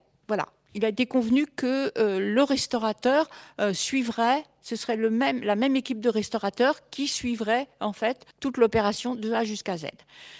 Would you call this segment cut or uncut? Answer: cut